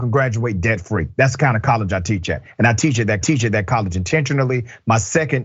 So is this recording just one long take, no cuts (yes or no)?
no